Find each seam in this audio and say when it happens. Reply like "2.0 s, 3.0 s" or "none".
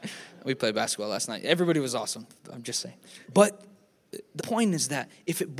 3.2 s, 4.4 s